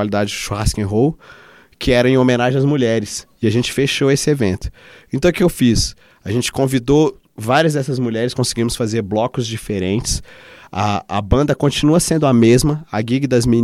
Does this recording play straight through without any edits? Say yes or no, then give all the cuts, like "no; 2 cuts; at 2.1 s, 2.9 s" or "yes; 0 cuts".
yes; 0 cuts